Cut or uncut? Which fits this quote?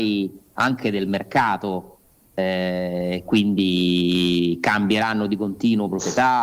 uncut